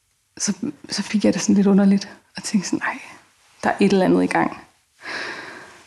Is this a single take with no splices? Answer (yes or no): yes